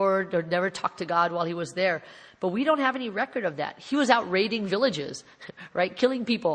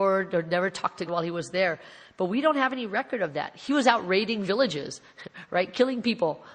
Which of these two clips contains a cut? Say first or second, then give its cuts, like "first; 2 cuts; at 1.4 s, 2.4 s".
second; 1 cut; at 1.1 s